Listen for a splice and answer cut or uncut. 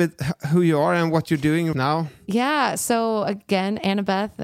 cut